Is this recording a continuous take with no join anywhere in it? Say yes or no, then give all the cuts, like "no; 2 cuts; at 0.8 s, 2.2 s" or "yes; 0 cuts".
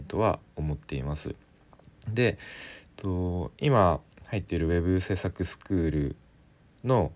yes; 0 cuts